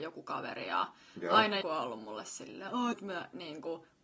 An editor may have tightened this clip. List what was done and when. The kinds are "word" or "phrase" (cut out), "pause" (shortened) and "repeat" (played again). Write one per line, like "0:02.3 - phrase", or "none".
0:01.6 - word
0:02.9 - word